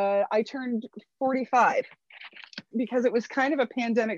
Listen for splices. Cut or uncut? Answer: cut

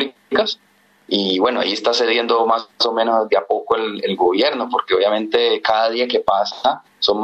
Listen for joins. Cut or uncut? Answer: cut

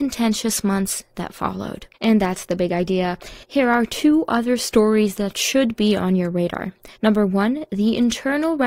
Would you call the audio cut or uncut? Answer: cut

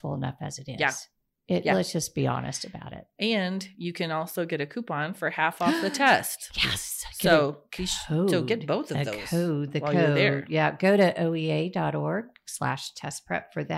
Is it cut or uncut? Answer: uncut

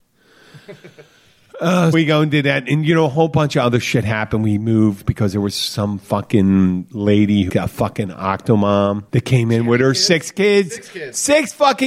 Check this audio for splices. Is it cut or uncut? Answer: cut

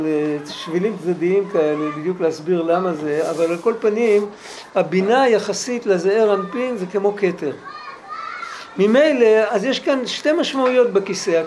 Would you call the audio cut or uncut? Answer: uncut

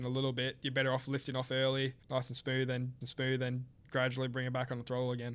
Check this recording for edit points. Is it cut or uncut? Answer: cut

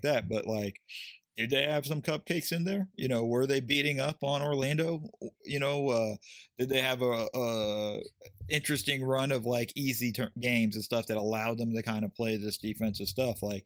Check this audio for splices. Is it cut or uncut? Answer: cut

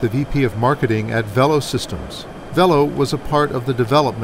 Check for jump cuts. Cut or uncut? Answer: uncut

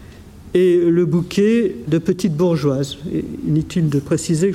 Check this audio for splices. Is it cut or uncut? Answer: cut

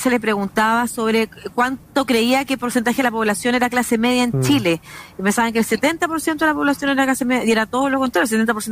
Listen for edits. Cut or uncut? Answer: uncut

